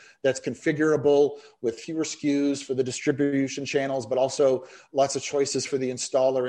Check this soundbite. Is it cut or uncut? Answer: uncut